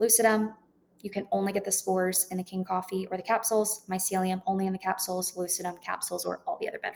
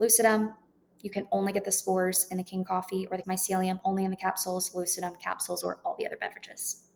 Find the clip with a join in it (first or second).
second